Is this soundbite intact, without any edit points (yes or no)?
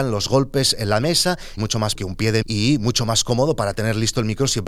no